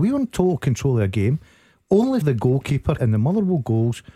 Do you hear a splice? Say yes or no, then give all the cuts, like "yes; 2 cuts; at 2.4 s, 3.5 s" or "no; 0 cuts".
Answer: yes; 2 cuts; at 2.2 s, 3.0 s